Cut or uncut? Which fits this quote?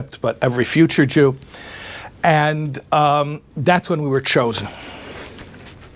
uncut